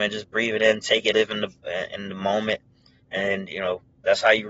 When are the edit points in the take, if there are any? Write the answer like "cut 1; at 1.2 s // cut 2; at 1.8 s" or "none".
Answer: cut 1; at 1.1 s